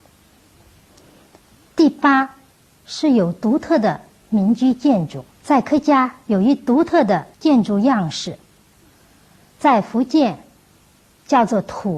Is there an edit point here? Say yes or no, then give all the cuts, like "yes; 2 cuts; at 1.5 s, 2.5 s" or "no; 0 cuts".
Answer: yes; 2 cuts; at 5.3 s, 7.3 s